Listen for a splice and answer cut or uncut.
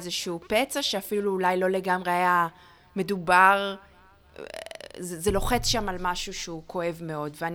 uncut